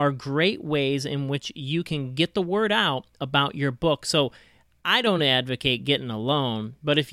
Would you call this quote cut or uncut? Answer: uncut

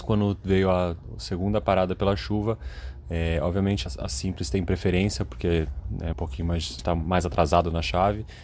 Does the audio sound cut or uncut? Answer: cut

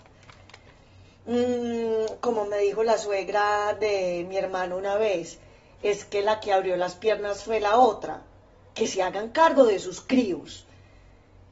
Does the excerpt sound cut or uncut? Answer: uncut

